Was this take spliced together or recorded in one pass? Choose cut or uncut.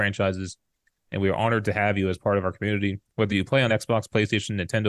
uncut